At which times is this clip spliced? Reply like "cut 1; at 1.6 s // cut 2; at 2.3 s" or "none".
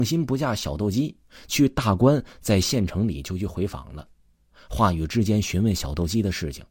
none